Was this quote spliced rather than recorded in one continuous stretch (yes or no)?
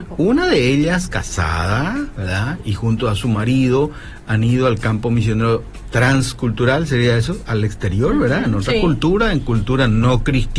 no